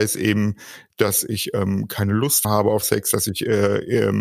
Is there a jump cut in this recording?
yes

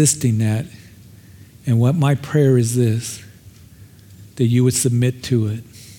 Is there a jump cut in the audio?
no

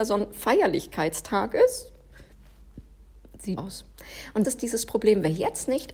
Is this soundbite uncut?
no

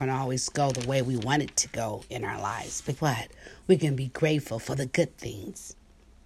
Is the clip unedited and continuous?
no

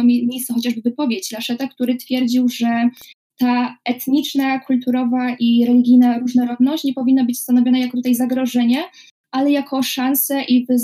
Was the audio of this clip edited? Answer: no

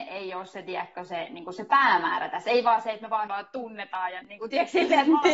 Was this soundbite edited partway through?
yes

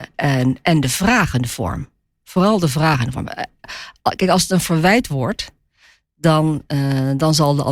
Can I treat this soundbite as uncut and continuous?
yes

